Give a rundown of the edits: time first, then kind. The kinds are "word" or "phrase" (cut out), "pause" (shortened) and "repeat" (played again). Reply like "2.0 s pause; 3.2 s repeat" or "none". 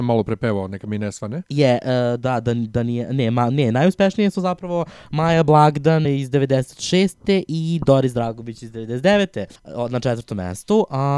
6.0 s word; 9.6 s pause